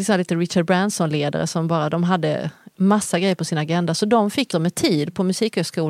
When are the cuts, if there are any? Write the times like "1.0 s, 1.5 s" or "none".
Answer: 4.5 s